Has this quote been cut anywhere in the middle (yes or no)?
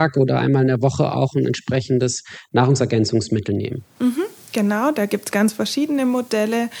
yes